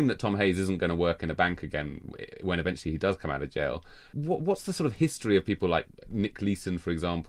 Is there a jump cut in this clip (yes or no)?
yes